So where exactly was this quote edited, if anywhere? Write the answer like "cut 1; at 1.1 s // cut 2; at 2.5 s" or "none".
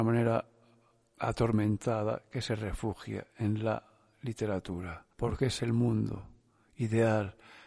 none